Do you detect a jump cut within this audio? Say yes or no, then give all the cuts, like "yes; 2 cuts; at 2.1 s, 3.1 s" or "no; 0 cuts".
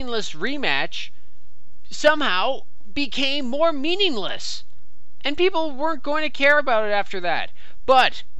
no; 0 cuts